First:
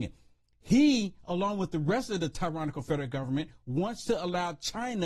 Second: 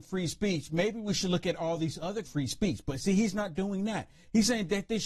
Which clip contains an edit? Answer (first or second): second